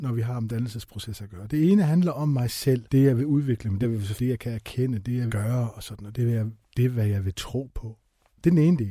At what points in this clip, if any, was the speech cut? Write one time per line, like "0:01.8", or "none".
0:02.9
0:03.8
0:04.2
0:05.3